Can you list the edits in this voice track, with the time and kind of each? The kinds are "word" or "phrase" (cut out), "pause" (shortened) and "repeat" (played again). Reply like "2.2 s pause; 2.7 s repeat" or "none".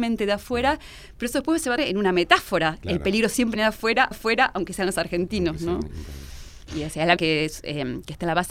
1.8 s word; 3.5 s word; 4.1 s repeat; 7.2 s phrase

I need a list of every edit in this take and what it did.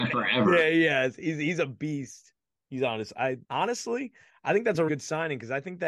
3.4 s pause; 4.9 s word

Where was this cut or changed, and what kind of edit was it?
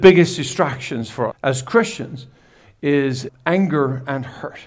1.3 s word; 3.3 s word

